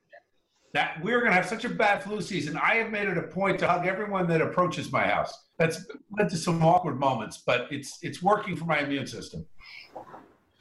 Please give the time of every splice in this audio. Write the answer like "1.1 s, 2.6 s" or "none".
5.5 s